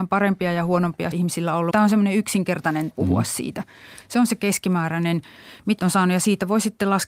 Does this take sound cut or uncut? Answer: cut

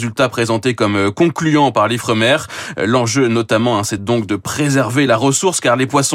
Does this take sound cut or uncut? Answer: uncut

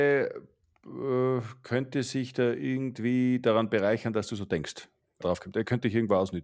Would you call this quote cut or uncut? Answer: cut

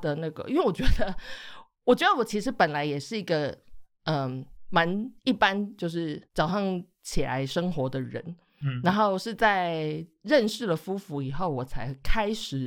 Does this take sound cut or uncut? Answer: cut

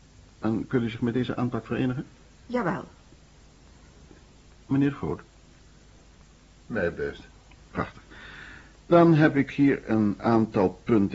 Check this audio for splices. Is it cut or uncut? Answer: uncut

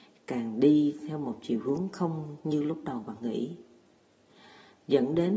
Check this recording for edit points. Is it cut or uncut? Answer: uncut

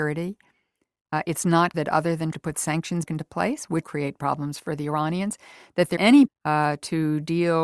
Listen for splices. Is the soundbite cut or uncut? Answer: cut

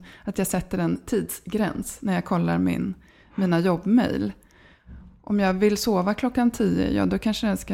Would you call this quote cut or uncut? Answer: uncut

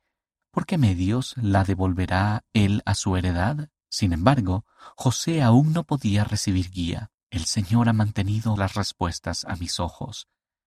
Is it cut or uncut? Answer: cut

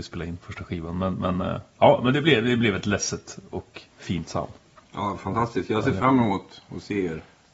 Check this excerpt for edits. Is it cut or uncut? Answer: cut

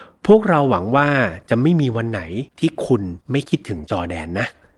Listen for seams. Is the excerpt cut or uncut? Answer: cut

